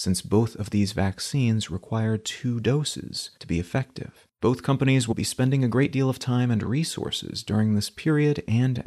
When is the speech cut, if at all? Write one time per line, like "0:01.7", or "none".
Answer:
0:03.4
0:04.3
0:05.1